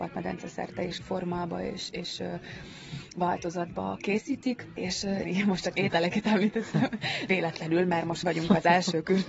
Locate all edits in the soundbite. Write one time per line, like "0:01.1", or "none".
0:01.0
0:05.2
0:07.3
0:08.2